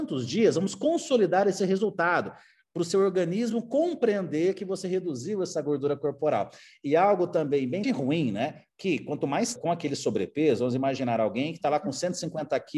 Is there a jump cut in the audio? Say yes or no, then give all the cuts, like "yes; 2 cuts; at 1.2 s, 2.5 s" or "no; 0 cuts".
yes; 2 cuts; at 7.8 s, 9.6 s